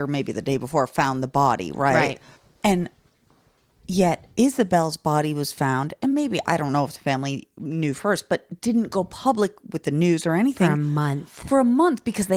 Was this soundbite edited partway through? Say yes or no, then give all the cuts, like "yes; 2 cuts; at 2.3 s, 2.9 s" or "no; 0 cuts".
no; 0 cuts